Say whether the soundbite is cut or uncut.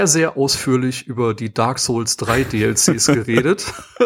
uncut